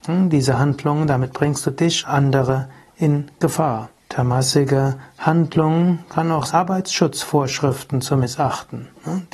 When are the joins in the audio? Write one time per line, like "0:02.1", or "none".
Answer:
0:02.0
0:04.0
0:06.5